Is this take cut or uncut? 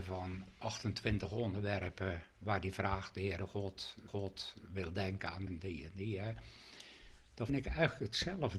cut